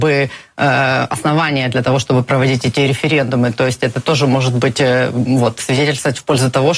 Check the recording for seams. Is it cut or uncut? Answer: uncut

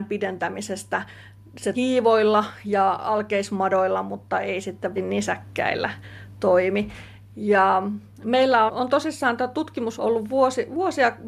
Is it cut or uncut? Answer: cut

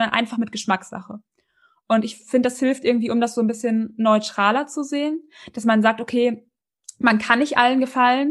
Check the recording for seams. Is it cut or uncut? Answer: uncut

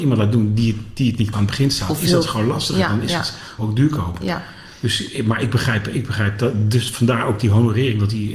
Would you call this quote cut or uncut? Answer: cut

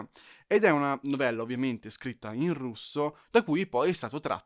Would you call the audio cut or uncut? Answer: uncut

